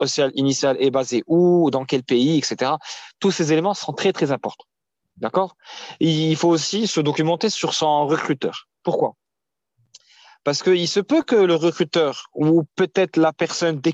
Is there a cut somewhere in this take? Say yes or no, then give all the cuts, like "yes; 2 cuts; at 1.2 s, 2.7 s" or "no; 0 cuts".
no; 0 cuts